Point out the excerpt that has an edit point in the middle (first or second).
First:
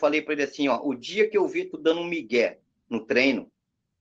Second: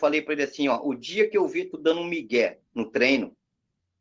second